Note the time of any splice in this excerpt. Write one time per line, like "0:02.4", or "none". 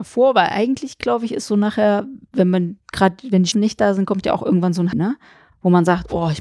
0:03.5
0:04.9